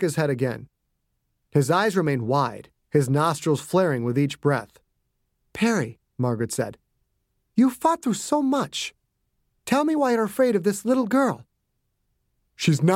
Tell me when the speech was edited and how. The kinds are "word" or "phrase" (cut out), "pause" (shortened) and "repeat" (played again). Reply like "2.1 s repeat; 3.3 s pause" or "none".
none